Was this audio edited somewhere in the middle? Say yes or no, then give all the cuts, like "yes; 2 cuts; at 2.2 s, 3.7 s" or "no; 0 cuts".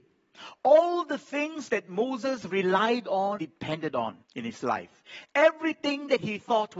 yes; 2 cuts; at 3.4 s, 4.2 s